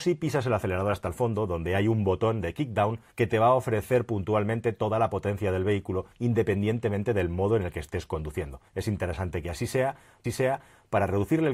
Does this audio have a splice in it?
yes; 4 cuts; at 3.1 s, 6.1 s, 8.7 s, 10.2 s

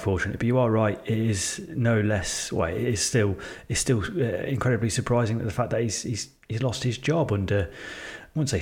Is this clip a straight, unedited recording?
yes; 0 cuts

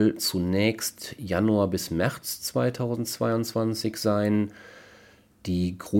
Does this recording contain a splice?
no; 0 cuts

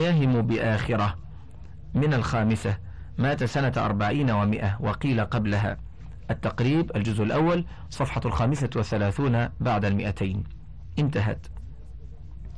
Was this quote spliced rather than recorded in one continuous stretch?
no; 0 cuts

